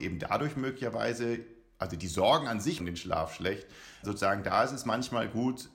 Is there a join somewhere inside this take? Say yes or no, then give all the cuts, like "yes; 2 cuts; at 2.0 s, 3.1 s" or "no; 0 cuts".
yes; 2 cuts; at 2.8 s, 4.0 s